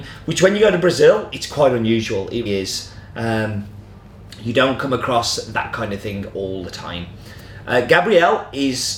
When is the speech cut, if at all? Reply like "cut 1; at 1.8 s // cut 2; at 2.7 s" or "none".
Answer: cut 1; at 2.5 s